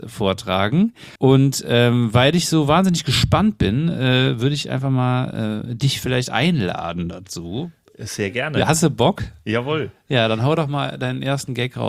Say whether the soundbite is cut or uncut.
cut